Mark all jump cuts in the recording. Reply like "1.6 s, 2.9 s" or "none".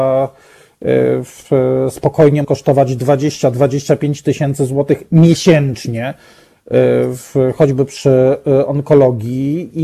2.4 s